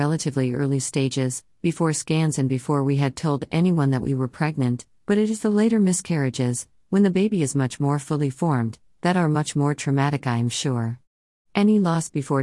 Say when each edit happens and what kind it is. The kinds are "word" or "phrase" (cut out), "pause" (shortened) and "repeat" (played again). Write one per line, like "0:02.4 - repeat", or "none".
none